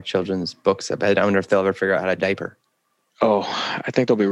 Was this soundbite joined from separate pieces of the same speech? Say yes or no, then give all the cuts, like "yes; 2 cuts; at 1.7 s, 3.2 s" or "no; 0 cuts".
yes; 1 cut; at 2.2 s